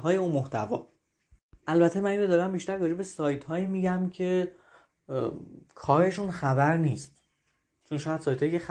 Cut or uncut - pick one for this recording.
uncut